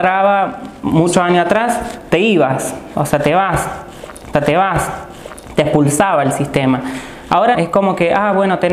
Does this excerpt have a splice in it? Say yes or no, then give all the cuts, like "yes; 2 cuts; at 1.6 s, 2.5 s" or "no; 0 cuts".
yes; 2 cuts; at 4.3 s, 7.5 s